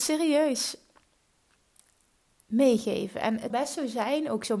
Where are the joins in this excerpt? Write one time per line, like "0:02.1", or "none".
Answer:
0:03.5